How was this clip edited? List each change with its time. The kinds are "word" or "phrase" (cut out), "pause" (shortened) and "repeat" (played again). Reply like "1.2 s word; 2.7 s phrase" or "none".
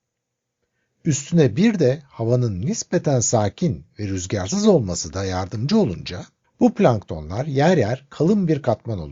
6.4 s pause